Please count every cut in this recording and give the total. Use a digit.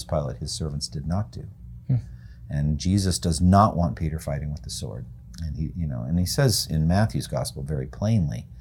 0